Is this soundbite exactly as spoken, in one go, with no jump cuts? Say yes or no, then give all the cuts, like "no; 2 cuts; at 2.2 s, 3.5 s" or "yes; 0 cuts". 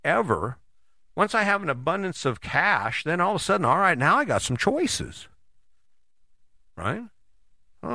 yes; 0 cuts